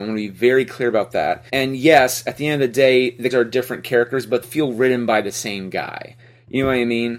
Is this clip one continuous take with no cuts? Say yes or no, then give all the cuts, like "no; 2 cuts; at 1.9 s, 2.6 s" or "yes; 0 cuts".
no; 3 cuts; at 1.5 s, 3.3 s, 4.4 s